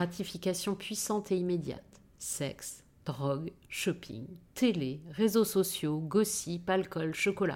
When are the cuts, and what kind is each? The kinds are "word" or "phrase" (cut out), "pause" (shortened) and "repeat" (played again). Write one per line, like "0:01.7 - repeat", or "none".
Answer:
none